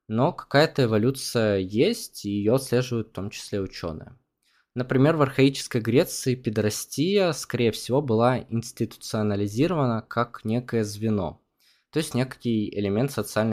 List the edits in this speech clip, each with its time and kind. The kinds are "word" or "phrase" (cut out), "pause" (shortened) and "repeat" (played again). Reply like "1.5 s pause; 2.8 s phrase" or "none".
none